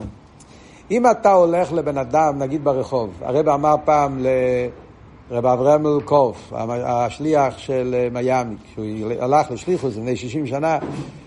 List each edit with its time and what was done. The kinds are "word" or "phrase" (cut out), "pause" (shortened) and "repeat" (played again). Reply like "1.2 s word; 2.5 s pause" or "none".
none